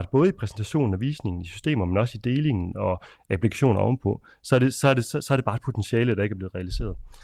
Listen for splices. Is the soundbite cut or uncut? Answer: uncut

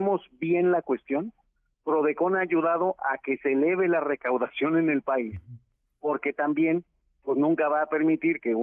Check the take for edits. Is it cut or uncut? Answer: uncut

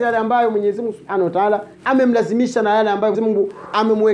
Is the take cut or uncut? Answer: cut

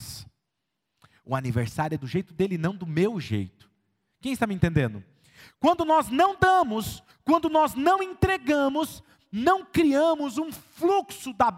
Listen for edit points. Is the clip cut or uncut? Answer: uncut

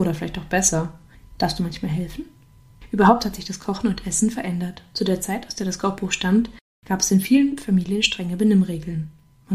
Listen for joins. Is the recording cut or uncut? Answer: uncut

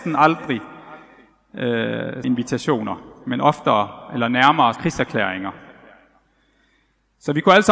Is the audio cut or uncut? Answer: cut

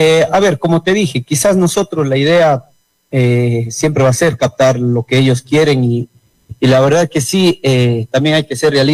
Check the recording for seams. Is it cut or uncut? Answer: uncut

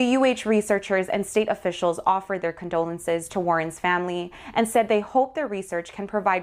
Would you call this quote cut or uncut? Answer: uncut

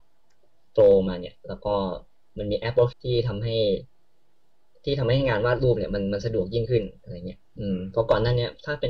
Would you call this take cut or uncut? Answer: cut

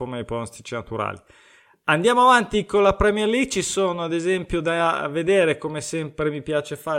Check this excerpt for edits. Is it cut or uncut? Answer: uncut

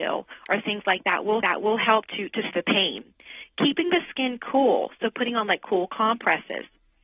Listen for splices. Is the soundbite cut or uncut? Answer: cut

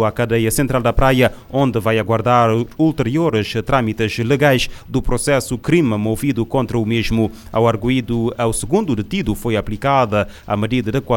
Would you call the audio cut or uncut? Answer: cut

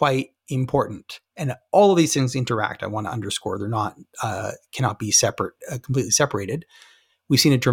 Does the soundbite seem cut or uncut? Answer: uncut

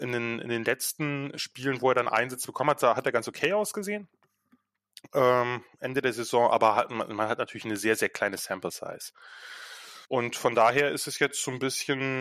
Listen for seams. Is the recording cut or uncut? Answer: cut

